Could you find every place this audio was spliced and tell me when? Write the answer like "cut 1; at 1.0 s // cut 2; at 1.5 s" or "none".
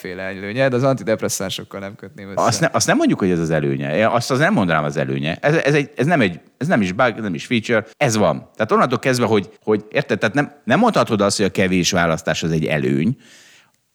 cut 1; at 7.9 s // cut 2; at 9.6 s